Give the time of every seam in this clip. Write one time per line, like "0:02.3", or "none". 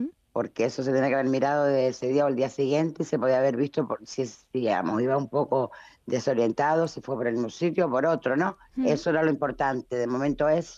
none